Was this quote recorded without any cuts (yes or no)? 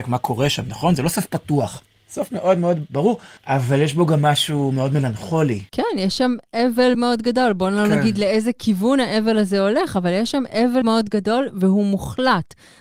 no